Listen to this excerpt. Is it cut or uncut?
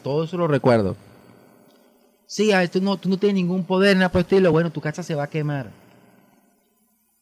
uncut